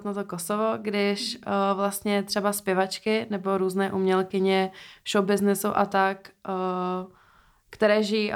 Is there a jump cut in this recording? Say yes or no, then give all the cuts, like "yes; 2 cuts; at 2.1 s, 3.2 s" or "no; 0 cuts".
no; 0 cuts